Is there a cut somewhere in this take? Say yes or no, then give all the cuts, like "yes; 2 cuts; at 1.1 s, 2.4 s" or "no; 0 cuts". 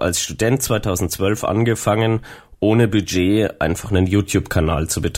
no; 0 cuts